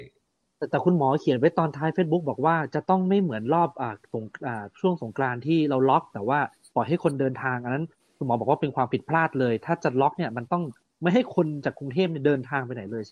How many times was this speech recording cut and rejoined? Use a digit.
0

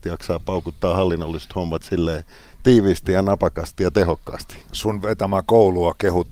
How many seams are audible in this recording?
0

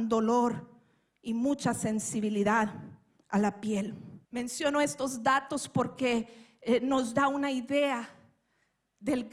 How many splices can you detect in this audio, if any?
1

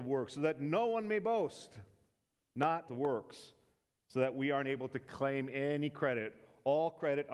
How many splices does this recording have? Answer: 1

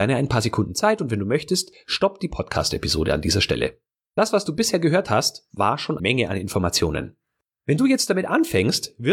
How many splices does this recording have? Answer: 1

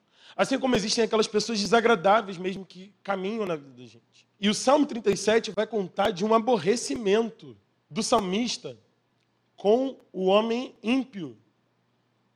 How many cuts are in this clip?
3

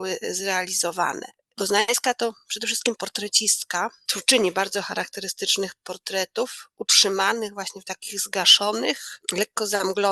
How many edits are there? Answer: 0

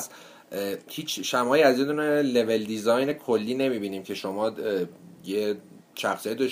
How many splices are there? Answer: 0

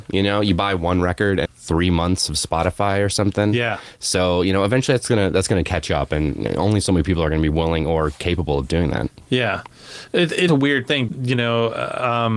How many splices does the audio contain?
3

